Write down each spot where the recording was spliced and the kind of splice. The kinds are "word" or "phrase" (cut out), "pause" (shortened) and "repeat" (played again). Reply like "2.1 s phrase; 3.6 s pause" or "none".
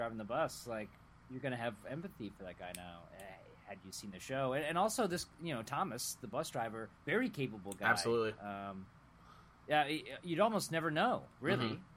6.9 s pause